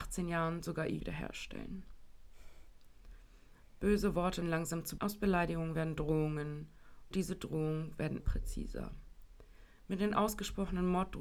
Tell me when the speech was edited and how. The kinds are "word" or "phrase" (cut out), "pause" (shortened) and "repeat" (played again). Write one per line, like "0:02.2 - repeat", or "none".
0:01.0 - word
0:04.4 - word
0:05.0 - word
0:07.1 - word
0:08.2 - word